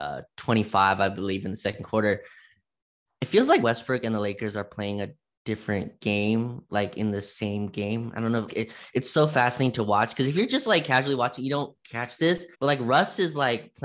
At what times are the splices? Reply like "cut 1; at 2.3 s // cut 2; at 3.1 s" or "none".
cut 1; at 3.6 s // cut 2; at 8.5 s // cut 3; at 12.5 s